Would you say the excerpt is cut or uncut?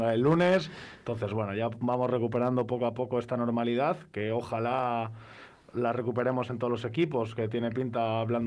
uncut